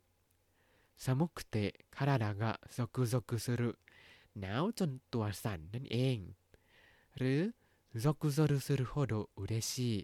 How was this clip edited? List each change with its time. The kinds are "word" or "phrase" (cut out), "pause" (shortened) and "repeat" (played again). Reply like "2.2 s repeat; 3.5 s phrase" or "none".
none